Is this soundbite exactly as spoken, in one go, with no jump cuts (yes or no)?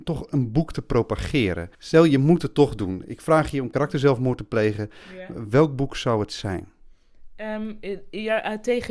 no